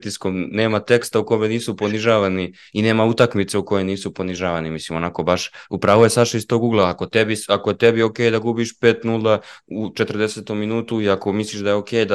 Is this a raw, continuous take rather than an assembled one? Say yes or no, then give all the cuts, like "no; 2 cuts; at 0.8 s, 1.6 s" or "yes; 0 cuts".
yes; 0 cuts